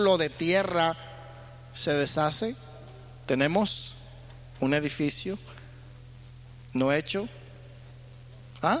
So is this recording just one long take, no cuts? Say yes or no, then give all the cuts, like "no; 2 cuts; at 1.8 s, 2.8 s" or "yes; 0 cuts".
yes; 0 cuts